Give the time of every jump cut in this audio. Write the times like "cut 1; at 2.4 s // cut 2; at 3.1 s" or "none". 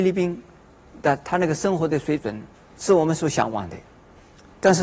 cut 1; at 2.5 s